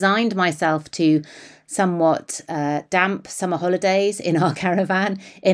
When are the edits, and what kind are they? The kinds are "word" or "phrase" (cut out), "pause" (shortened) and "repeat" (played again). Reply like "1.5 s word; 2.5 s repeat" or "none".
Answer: none